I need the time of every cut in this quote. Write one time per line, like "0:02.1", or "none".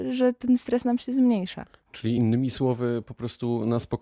none